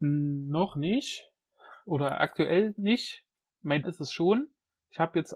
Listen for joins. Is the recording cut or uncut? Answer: cut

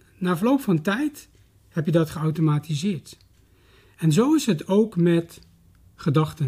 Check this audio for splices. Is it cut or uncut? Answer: uncut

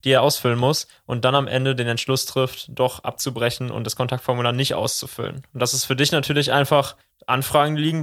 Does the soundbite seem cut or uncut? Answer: uncut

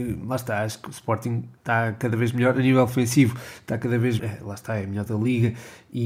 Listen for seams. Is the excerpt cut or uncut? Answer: cut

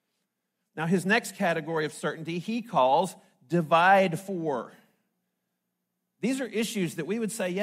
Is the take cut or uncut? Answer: uncut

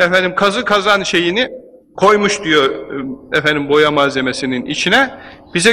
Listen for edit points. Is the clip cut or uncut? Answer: uncut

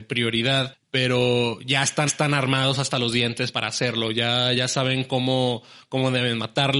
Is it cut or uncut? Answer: cut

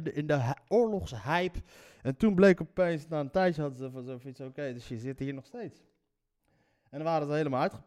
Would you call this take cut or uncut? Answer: uncut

